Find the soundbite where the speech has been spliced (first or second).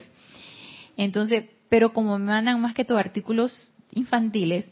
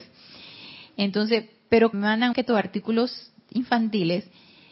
second